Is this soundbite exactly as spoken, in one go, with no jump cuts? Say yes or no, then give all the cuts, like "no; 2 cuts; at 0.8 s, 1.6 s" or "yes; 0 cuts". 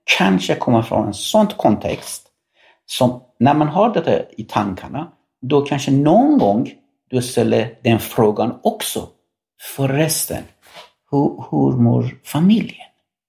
yes; 0 cuts